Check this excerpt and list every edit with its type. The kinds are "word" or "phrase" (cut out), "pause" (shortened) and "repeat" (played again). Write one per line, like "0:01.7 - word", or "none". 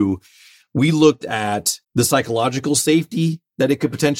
0:01.8 - pause